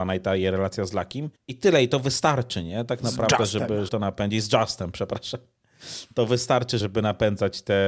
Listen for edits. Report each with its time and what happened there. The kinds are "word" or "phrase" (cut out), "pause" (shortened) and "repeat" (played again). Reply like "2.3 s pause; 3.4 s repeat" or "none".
1.3 s pause; 3.9 s word; 6.8 s word